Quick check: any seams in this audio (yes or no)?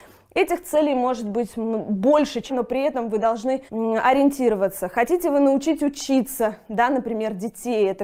yes